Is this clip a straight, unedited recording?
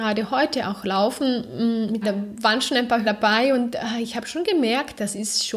no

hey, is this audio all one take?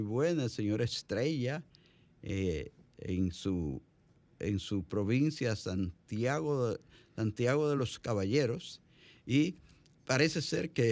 yes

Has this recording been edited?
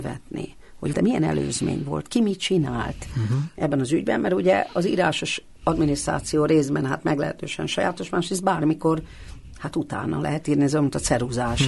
yes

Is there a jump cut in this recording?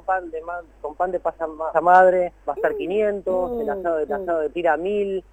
yes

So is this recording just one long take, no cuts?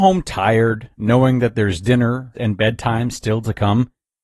no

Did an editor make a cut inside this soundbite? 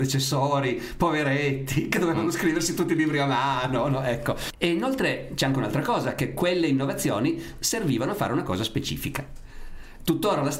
no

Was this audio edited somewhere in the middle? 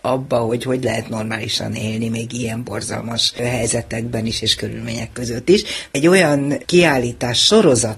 no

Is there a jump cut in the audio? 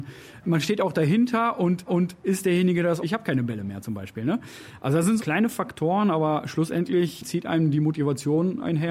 yes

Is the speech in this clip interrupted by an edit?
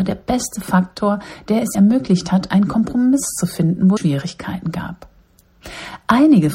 yes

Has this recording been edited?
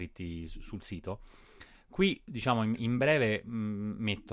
no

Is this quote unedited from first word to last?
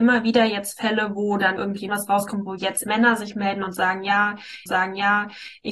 no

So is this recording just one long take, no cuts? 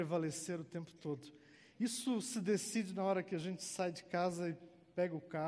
yes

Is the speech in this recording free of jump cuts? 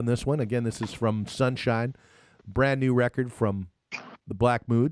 yes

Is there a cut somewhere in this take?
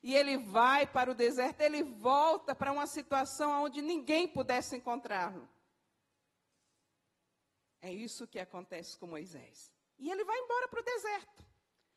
no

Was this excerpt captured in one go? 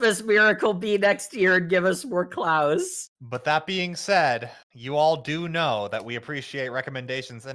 no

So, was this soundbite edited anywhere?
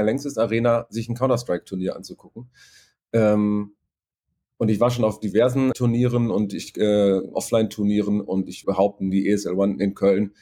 yes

